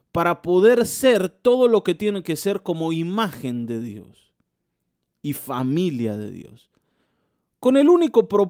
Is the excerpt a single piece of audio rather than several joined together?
yes; 0 cuts

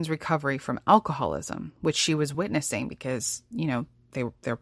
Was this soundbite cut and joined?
no; 0 cuts

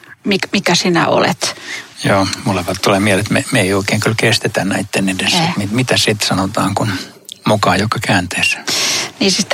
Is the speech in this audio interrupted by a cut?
yes; 1 cut; at 1.9 s

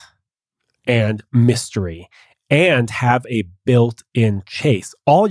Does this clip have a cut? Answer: no; 0 cuts

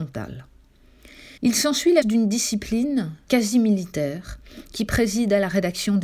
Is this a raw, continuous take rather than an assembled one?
no; 3 cuts; at 1.4 s, 2.0 s, 3.3 s

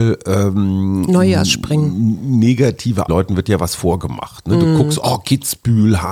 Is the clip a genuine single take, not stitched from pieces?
no; 1 cut; at 3.1 s

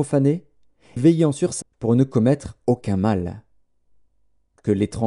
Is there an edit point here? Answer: yes; 2 cuts; at 1.0 s, 1.6 s

